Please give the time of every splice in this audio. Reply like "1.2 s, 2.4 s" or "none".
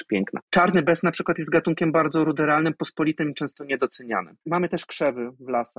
4.4 s